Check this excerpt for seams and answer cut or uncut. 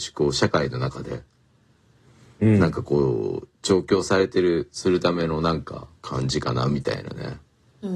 uncut